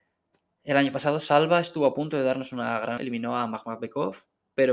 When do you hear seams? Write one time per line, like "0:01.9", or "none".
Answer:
0:03.0